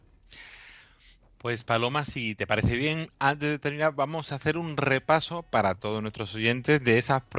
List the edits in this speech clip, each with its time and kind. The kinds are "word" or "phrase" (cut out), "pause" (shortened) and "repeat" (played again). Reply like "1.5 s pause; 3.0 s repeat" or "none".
none